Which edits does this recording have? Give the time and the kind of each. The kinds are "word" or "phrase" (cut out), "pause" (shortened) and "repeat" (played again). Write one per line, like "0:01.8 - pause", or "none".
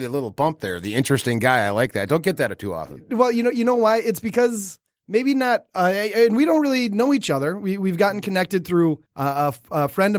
0:09.1 - pause